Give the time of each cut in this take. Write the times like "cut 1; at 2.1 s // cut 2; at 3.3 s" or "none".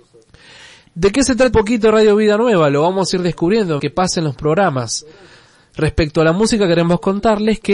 cut 1; at 1.5 s // cut 2; at 3.8 s

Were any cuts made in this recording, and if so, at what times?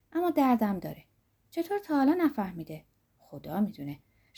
none

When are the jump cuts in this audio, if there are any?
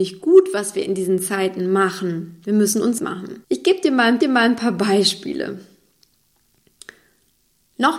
cut 1; at 3.0 s // cut 2; at 3.4 s // cut 3; at 4.2 s

